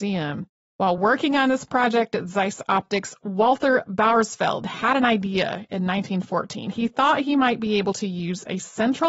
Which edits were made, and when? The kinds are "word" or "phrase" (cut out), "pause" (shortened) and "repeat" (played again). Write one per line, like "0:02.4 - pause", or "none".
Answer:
none